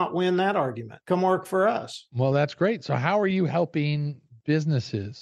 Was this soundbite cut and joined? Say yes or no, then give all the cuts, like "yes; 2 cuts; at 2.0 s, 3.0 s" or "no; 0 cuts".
no; 0 cuts